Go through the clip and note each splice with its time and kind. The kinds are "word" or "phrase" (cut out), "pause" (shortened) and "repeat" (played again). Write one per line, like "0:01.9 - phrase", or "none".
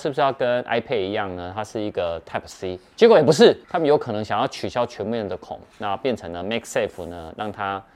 0:03.6 - pause